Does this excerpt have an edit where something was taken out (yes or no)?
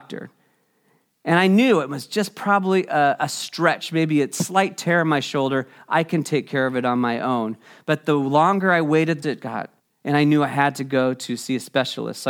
yes